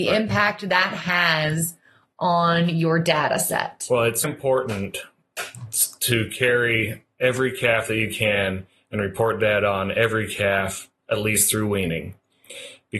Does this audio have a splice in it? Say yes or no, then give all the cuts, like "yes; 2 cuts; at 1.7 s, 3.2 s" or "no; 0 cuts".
yes; 1 cut; at 4.2 s